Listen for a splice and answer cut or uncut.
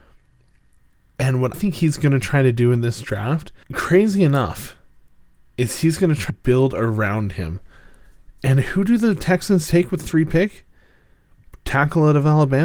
cut